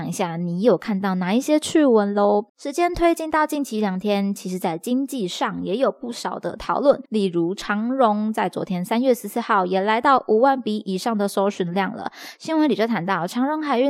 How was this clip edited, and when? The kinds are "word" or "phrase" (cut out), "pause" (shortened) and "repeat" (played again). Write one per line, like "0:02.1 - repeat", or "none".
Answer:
0:02.5 - pause
0:07.1 - pause